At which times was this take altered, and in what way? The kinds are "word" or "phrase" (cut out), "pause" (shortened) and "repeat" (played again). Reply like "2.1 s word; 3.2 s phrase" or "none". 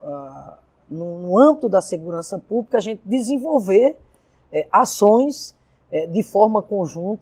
none